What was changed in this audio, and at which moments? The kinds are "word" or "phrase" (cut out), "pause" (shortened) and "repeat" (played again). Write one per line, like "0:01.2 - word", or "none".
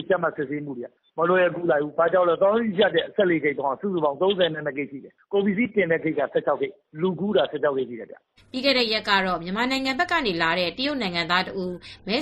none